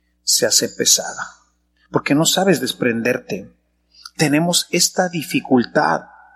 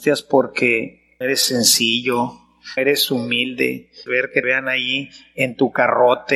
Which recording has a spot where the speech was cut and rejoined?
second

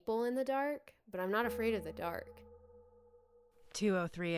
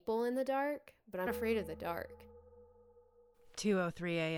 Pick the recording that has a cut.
second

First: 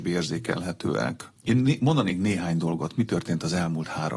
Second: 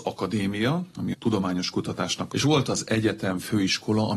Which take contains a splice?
second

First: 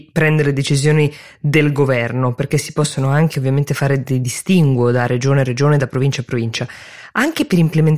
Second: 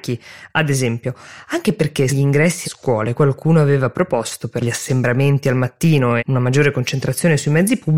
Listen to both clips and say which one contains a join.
second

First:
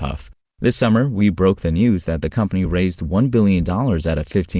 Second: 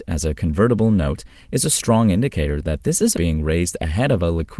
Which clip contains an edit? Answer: second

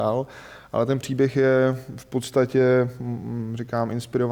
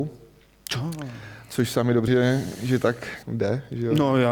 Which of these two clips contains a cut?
second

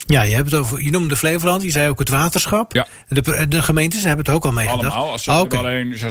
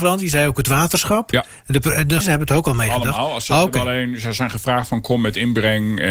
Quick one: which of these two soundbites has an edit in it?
second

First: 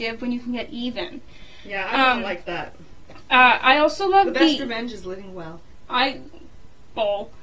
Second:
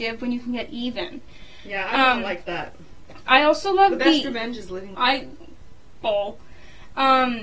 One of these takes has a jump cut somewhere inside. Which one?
second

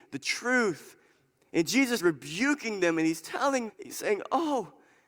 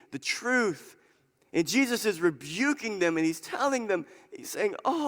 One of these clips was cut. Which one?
first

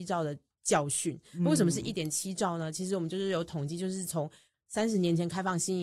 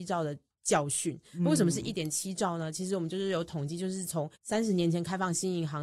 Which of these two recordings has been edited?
second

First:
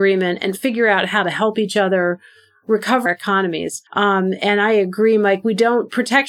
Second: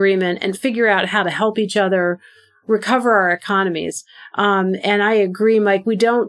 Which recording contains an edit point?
first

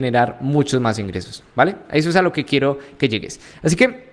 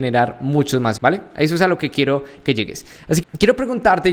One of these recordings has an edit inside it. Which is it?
second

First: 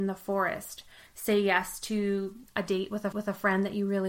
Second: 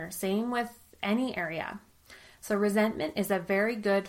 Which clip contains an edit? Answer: first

